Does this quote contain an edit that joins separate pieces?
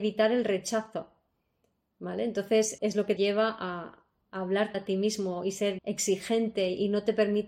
yes; 4 cuts; at 2.8 s, 3.2 s, 4.7 s, 5.8 s

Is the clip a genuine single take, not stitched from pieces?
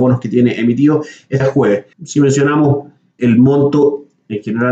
no; 3 cuts; at 1.4 s, 1.9 s, 3.2 s

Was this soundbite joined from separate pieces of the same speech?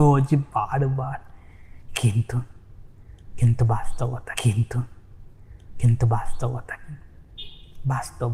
yes; 1 cut; at 4.3 s

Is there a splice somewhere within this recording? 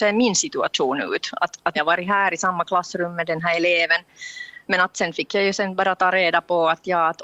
yes; 1 cut; at 1.7 s

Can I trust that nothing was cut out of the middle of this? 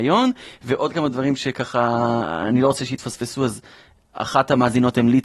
yes; 0 cuts

